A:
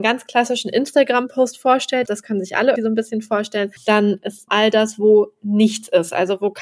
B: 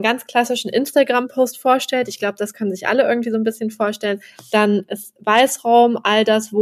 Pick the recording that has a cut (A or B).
A